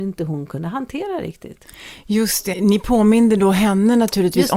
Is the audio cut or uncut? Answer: cut